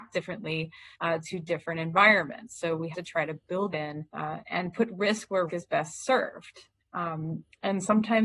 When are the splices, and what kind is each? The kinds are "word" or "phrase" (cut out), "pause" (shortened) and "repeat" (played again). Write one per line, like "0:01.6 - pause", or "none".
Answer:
0:00.9 - pause
0:02.9 - word
0:03.7 - word
0:04.1 - pause
0:05.5 - word
0:06.8 - pause